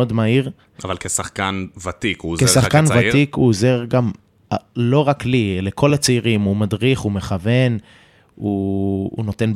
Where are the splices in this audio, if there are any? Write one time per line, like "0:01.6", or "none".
none